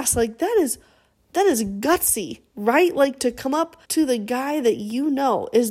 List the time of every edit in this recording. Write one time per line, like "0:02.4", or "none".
0:03.8